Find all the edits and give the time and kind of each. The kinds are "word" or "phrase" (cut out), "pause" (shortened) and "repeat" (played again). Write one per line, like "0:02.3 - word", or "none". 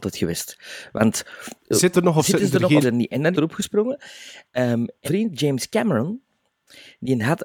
0:01.6 - pause
0:01.9 - word
0:02.8 - word
0:03.3 - phrase
0:05.0 - word